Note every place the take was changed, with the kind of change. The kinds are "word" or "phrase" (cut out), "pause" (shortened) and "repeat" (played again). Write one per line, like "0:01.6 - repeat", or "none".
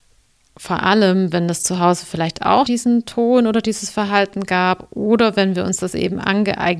0:02.7 - word